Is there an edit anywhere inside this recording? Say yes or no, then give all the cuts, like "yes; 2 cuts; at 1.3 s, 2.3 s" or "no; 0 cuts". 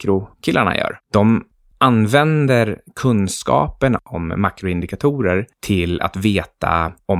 no; 0 cuts